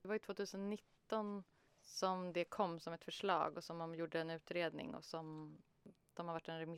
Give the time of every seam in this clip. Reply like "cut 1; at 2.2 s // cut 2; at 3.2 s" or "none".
none